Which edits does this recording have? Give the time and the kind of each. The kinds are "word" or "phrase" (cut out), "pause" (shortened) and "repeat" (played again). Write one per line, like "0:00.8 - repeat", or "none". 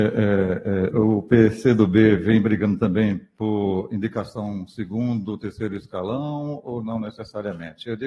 none

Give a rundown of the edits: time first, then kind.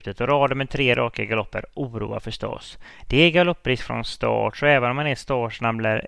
none

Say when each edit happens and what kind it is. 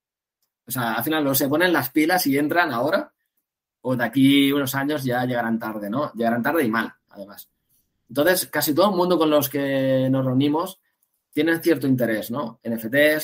none

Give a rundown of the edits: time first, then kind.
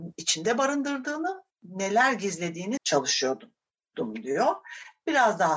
0:01.5 - word
0:02.8 - word

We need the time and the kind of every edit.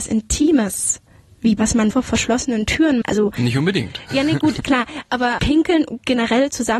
0:01.6 - word
0:01.9 - word
0:03.0 - word
0:04.6 - word
0:05.4 - word

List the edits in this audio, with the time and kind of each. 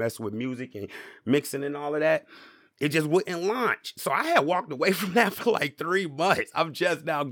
none

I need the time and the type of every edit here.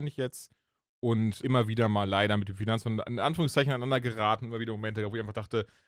0:01.4 - word

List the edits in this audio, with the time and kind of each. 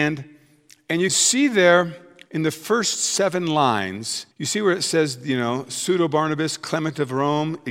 0:01.1 - word
0:02.3 - pause
0:04.3 - pause

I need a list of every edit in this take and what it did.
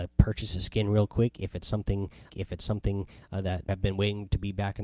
0:02.3 - repeat
0:03.7 - word

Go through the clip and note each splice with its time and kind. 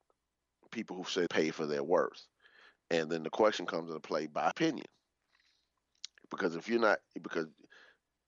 0:01.3 - phrase
0:04.5 - word

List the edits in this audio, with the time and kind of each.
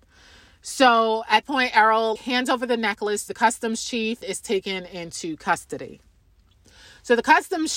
0:01.4 - word
0:02.2 - word
0:03.3 - word
0:04.2 - word

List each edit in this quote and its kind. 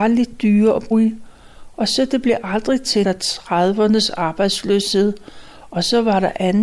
0:00.9 - word
0:03.0 - phrase

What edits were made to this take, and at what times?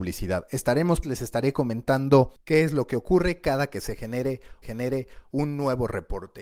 0:01.0 - word
0:02.4 - pause
0:04.6 - repeat

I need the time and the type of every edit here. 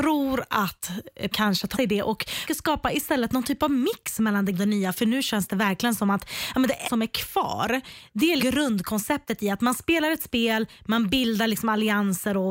0:01.3 - word
0:01.7 - word
0:02.5 - word
0:04.5 - word
0:06.8 - word
0:08.4 - word

